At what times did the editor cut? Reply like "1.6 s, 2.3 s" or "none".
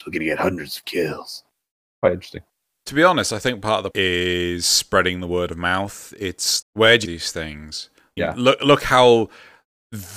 3.9 s, 6.6 s, 7.0 s, 8.2 s